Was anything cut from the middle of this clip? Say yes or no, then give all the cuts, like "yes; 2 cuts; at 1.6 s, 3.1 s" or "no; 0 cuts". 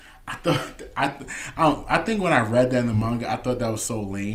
no; 0 cuts